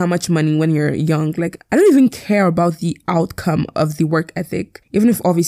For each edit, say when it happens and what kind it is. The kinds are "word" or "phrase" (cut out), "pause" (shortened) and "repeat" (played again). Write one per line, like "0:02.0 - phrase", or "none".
none